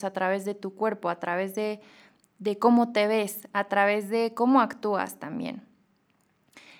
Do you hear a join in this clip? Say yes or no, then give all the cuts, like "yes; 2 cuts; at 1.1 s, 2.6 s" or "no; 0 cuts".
no; 0 cuts